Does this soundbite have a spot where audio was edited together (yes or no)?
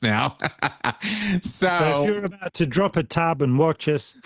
no